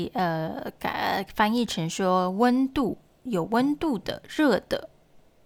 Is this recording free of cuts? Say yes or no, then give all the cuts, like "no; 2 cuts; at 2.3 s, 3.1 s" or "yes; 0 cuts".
yes; 0 cuts